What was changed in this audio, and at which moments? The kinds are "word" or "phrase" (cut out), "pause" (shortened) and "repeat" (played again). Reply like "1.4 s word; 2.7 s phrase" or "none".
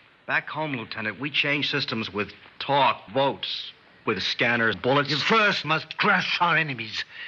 3.1 s word; 4.1 s word; 4.7 s word; 5.6 s word

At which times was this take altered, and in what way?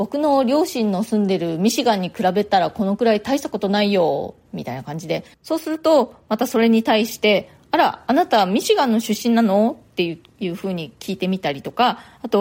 5.3 s pause

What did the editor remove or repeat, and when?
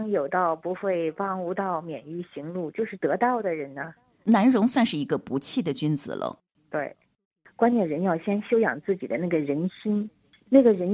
none

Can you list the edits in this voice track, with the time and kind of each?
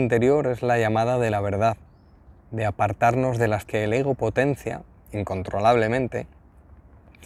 2.4 s pause; 3.6 s word

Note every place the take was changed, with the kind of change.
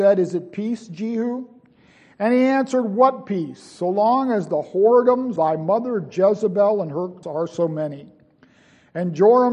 5.4 s word; 7.2 s word

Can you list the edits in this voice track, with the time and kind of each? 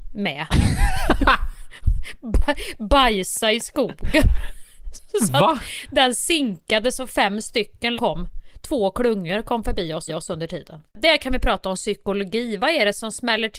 8.0 s word; 10.1 s repeat; 10.9 s pause

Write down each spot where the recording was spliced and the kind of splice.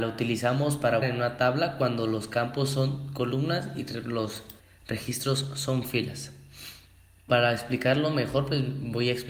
1.0 s word; 4.6 s pause; 7.3 s word

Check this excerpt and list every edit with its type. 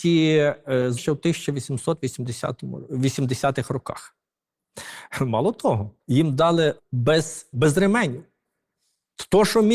1.0 s word; 6.0 s pause; 6.8 s word; 7.5 s word

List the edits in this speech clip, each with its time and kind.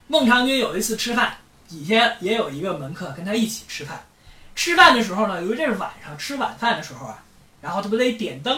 none

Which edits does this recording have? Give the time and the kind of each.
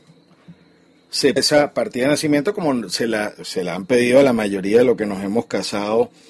1.4 s word

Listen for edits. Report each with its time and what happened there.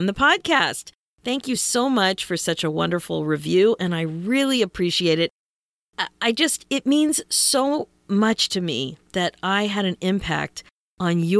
none

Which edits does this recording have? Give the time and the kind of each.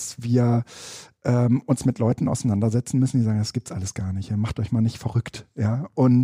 none

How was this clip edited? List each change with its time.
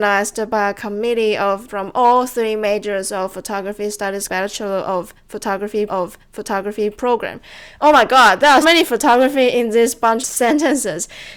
1.7 s word; 4.3 s word; 5.9 s repeat; 8.6 s word; 10.2 s word

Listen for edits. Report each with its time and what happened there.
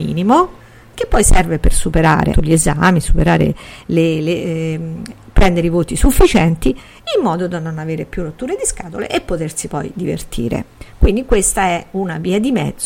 2.3 s word

